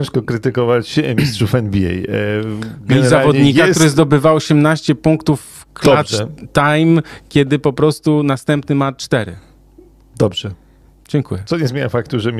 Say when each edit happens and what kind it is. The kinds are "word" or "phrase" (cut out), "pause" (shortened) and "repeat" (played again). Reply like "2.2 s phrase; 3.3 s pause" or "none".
none